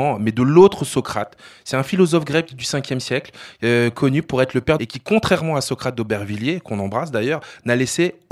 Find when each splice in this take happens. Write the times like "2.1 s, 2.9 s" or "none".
4.8 s